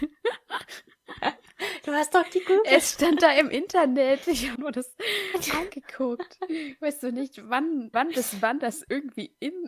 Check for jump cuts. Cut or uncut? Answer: cut